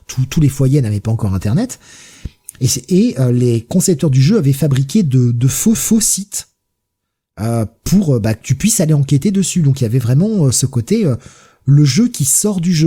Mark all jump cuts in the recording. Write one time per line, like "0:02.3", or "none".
0:05.7